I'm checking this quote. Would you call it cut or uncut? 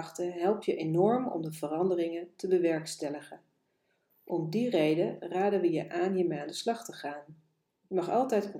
uncut